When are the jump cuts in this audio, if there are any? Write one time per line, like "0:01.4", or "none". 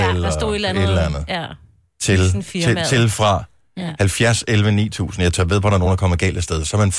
none